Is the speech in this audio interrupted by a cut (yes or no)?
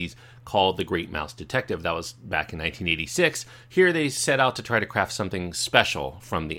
no